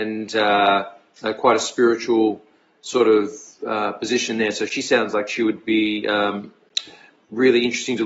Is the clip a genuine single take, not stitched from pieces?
yes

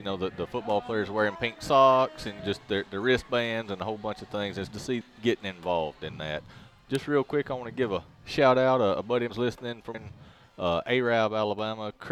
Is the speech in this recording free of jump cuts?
no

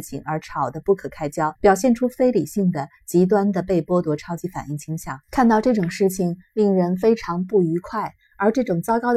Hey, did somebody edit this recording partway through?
yes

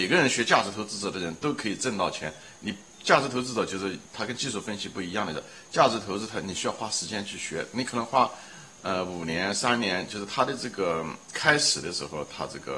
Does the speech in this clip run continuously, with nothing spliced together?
no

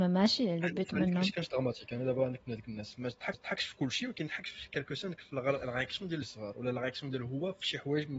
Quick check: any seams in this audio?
yes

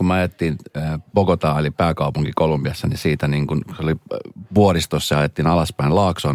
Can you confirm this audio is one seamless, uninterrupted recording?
no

